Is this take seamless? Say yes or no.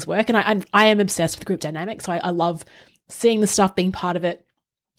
yes